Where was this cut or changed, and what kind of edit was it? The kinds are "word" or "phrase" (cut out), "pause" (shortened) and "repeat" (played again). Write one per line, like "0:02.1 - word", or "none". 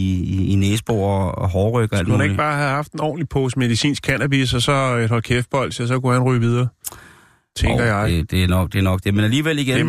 none